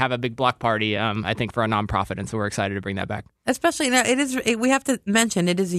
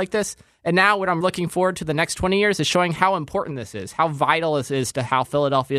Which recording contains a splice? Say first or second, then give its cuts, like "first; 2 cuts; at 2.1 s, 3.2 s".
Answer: second; 1 cut; at 1.2 s